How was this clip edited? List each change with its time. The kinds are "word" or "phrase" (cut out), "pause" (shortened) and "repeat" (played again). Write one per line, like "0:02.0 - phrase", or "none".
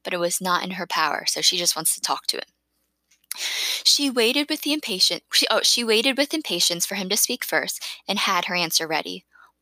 none